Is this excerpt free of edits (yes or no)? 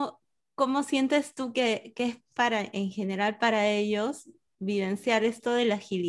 yes